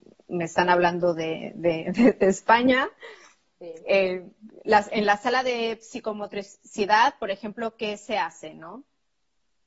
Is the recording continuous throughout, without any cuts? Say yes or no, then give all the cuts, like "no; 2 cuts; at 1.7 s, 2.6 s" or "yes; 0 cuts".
yes; 0 cuts